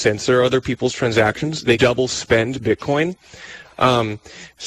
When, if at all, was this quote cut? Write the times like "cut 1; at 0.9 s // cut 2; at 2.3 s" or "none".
cut 1; at 1.8 s